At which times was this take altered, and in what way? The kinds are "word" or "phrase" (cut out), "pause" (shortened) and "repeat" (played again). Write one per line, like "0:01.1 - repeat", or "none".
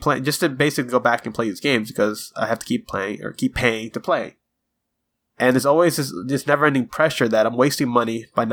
none